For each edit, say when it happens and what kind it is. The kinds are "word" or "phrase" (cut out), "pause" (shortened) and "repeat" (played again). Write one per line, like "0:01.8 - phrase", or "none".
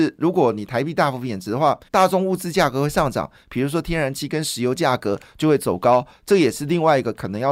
0:01.9 - pause